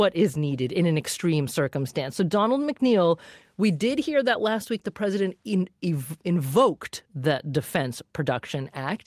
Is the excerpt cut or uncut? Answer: uncut